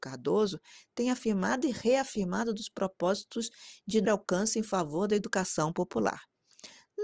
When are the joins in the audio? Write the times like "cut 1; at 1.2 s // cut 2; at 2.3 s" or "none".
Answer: cut 1; at 4.0 s